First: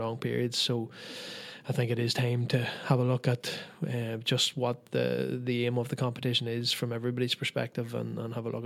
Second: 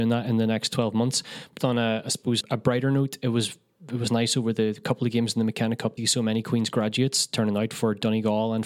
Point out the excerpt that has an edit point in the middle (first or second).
second